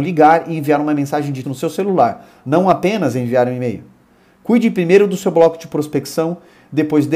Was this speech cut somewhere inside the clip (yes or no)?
yes